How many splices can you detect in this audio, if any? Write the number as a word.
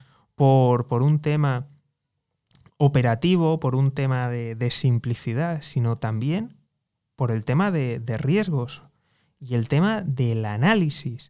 zero